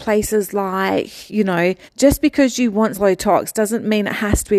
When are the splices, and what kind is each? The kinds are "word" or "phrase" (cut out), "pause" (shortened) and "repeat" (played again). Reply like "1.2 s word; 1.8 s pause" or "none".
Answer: 1.9 s pause; 2.9 s word